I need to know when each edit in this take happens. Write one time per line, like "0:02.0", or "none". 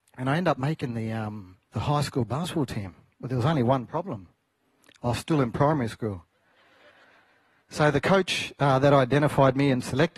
none